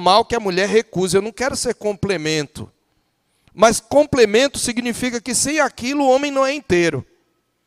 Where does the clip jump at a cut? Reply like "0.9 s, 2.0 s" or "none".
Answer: none